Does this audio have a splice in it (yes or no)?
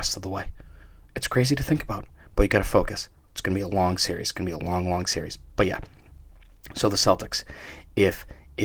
no